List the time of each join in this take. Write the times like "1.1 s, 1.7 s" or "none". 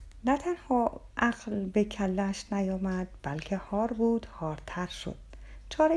none

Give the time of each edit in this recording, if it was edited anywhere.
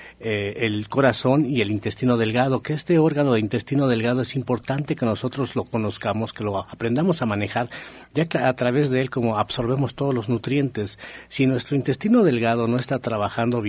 8.3 s

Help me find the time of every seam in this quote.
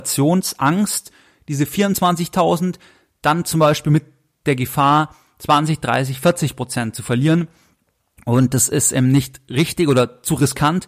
none

